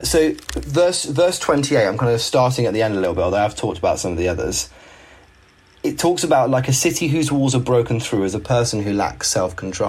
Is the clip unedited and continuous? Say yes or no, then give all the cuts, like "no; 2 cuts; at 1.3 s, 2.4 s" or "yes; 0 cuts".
yes; 0 cuts